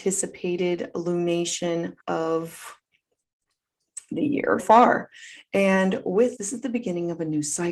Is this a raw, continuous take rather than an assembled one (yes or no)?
no